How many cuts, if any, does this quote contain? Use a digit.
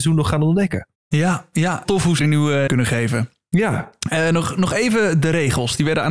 4